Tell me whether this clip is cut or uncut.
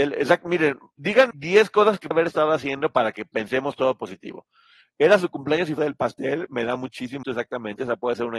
cut